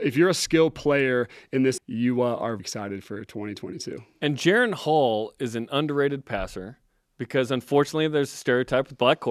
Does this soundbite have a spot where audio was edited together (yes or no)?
yes